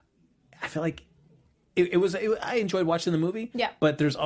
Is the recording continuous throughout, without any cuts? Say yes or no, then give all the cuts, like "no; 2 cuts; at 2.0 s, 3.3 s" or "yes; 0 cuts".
yes; 0 cuts